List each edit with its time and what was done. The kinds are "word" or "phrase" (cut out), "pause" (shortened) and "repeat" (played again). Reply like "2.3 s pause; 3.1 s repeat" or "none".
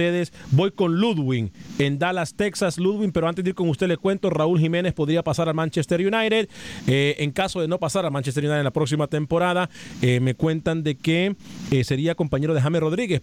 none